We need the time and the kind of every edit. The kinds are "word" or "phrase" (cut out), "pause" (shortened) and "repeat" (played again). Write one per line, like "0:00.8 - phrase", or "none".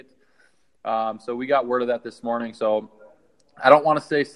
none